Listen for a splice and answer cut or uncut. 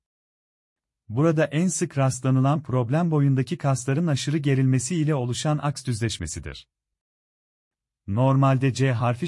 uncut